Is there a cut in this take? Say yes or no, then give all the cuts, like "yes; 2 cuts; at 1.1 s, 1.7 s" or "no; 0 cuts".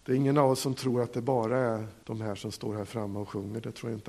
yes; 1 cut; at 2.0 s